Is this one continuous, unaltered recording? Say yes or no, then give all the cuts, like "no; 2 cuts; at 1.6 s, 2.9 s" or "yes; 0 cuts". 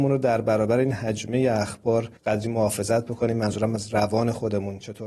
no; 1 cut; at 2.2 s